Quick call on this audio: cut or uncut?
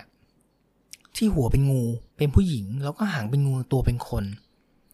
cut